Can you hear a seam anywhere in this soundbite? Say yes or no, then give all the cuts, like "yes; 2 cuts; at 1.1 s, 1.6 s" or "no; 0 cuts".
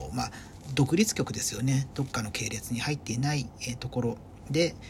no; 0 cuts